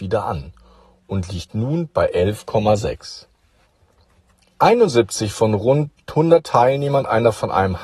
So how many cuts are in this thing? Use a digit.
0